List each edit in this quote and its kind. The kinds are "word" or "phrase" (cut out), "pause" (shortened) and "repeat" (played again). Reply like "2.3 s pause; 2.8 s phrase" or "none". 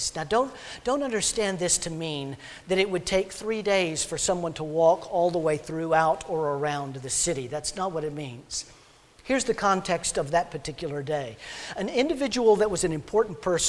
none